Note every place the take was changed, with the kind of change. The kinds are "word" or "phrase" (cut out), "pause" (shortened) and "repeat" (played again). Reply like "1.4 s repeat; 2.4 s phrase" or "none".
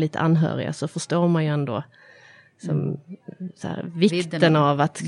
none